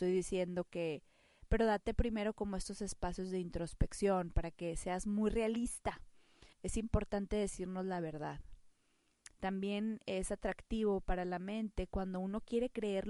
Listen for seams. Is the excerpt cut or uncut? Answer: cut